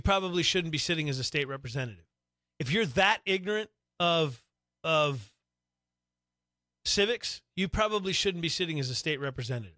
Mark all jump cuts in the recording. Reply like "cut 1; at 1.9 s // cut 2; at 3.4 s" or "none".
none